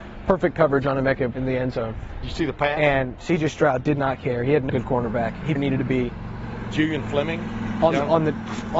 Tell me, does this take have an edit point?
yes; 3 cuts; at 1.3 s, 4.7 s, 5.6 s

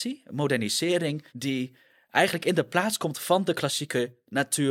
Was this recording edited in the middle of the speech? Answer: yes; 1 cut; at 1.3 s

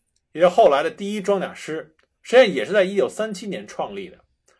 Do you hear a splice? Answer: no; 0 cuts

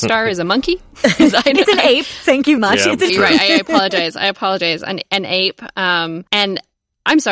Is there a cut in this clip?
yes; 3 cuts; at 2.6 s, 3.1 s, 6.3 s

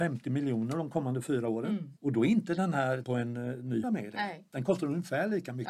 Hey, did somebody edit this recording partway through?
yes; 3 cuts; at 2.0 s, 3.0 s, 3.8 s

